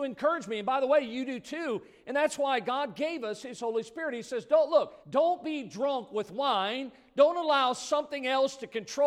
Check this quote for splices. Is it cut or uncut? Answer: cut